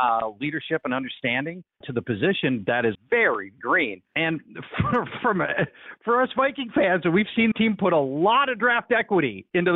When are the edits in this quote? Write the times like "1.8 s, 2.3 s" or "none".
1.8 s, 2.9 s, 3.6 s, 7.5 s